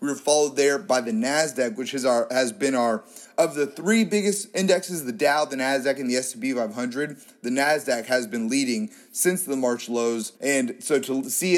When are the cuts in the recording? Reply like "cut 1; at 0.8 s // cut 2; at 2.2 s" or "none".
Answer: cut 1; at 10.4 s